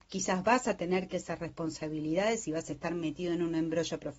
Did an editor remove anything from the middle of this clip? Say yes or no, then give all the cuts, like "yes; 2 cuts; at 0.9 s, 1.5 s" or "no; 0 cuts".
yes; 1 cut; at 1.1 s